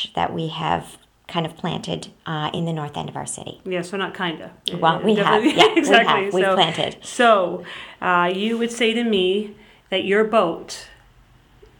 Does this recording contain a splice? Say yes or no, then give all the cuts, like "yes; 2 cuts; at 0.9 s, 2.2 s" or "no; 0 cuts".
no; 0 cuts